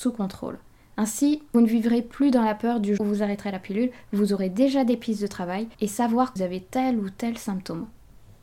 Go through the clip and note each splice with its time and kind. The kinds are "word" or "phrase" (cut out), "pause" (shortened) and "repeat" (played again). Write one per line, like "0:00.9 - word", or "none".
0:01.5 - word
0:03.0 - word
0:05.7 - pause
0:06.4 - phrase